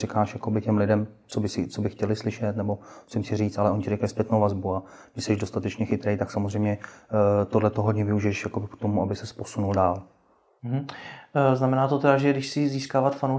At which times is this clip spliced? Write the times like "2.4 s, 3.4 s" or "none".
none